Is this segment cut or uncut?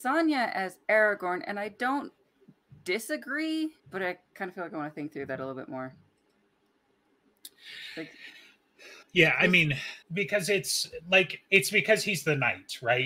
cut